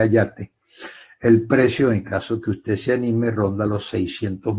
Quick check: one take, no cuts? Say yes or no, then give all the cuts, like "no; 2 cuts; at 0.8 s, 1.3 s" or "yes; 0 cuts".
yes; 0 cuts